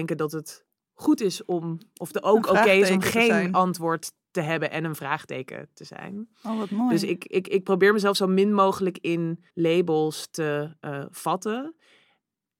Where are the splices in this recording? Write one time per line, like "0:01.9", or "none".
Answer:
0:09.5